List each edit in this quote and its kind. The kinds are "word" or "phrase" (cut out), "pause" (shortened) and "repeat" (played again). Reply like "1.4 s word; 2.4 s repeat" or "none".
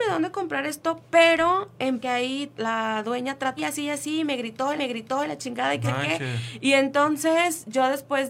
2.0 s phrase; 2.6 s word; 3.6 s word; 4.8 s repeat; 5.8 s word